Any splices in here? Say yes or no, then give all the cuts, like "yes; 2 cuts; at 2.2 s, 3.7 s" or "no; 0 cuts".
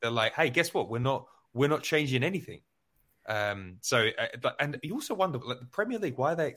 no; 0 cuts